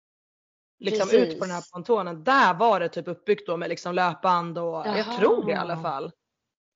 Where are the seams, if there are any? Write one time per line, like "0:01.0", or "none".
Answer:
none